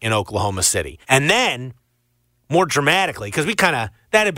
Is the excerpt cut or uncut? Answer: cut